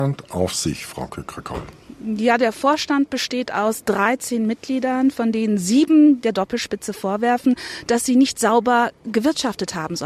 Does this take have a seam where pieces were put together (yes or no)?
no